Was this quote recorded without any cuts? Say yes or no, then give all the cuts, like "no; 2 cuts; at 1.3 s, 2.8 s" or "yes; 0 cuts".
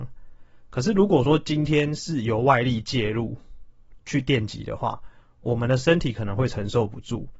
yes; 0 cuts